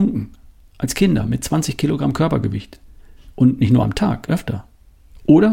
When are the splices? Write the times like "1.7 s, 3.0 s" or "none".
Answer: 3.8 s, 4.3 s